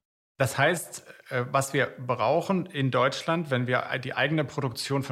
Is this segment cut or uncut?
uncut